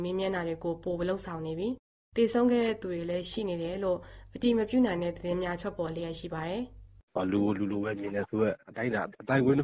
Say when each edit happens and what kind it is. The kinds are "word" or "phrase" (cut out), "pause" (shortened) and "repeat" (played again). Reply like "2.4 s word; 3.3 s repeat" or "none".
8.6 s pause